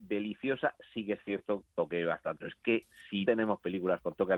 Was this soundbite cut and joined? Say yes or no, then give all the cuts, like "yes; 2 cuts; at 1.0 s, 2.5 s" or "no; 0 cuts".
yes; 3 cuts; at 1.6 s, 2.4 s, 3.3 s